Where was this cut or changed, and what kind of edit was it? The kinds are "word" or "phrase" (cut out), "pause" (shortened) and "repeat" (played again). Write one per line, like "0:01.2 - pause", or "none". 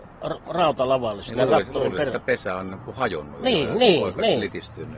none